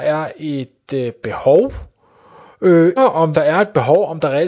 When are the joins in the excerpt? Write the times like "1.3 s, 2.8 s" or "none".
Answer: 3.0 s, 3.3 s